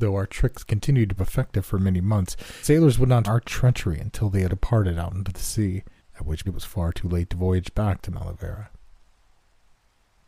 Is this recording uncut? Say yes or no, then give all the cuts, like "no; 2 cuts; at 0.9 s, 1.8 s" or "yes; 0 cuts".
no; 6 cuts; at 1.2 s, 2.6 s, 3.2 s, 4.5 s, 6.0 s, 6.4 s